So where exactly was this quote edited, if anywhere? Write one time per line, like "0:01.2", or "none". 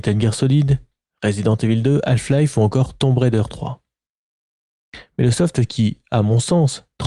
none